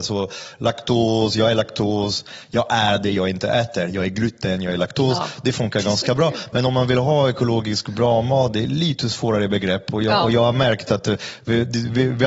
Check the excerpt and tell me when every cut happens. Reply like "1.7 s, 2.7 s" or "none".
none